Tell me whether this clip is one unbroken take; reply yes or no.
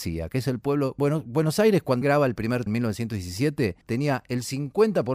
no